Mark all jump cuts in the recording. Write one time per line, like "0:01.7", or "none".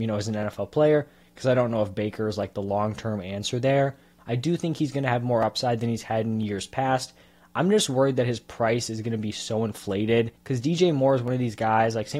0:10.4